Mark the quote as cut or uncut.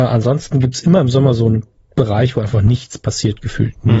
cut